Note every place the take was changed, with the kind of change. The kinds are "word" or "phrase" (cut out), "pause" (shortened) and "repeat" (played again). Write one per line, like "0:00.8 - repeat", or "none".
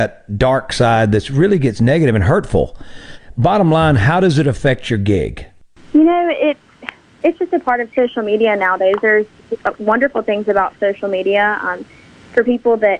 none